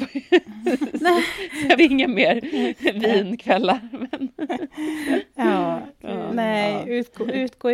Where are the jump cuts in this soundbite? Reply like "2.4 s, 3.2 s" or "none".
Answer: 1.8 s